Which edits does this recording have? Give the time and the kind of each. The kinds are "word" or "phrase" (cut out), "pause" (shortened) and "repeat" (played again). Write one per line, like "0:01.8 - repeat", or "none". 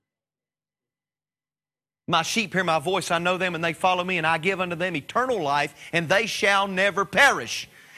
none

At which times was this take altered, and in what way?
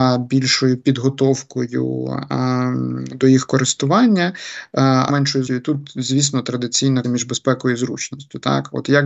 0:05.1 - word
0:05.5 - word
0:07.0 - word

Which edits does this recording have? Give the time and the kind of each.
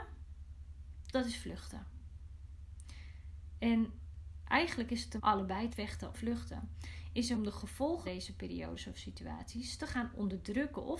0:01.1 - word
0:05.2 - word
0:05.7 - word
0:06.1 - word
0:07.3 - word
0:08.0 - word

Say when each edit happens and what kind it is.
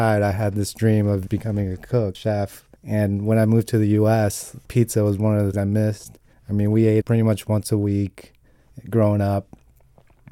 0:01.3 - word
0:02.1 - word
0:02.8 - pause
0:05.5 - word
0:06.3 - pause
0:07.0 - word

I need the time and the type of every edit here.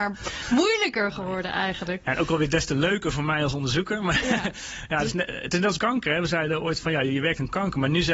0:05.8 - word

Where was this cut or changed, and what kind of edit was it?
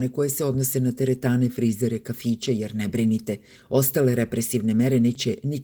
none

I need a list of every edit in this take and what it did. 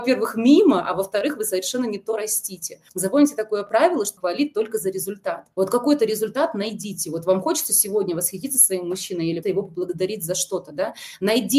0:02.9 - pause
0:04.2 - phrase
0:05.5 - pause
0:09.4 - word

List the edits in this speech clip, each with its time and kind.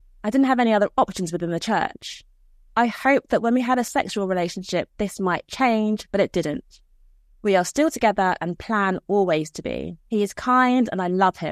0:10.0 - pause

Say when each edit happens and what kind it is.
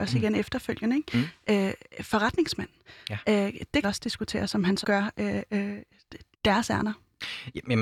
0:03.8 - phrase
0:04.8 - word
0:05.5 - word
0:06.3 - pause

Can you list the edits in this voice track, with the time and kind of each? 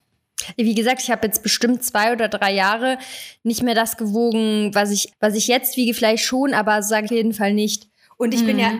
0:05.1 - word
0:07.1 - phrase

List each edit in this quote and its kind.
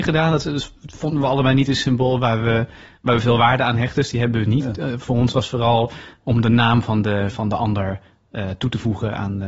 none

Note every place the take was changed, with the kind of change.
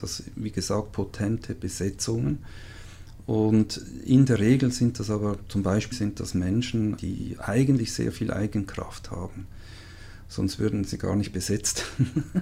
0:05.9 - word
0:07.0 - word
0:07.4 - word

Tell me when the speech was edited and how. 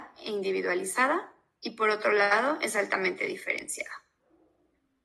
none

